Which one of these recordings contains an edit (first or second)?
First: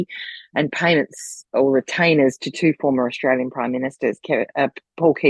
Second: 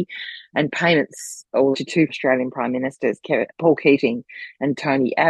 second